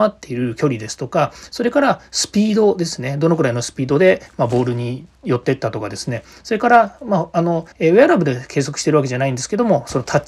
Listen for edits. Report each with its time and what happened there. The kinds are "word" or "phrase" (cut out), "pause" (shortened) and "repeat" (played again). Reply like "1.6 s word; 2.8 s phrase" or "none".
7.7 s pause